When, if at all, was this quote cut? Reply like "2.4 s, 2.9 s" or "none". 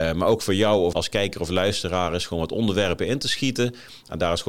0.9 s